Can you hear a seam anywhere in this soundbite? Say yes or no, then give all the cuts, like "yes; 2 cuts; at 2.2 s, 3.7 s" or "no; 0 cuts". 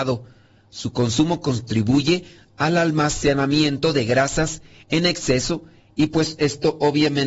no; 0 cuts